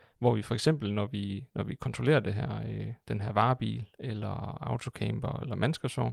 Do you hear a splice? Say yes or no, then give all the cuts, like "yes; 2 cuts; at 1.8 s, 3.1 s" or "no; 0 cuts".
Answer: no; 0 cuts